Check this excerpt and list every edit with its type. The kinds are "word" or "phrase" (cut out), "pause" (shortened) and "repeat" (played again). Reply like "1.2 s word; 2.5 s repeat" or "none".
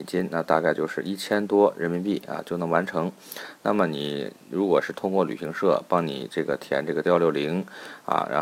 7.0 s word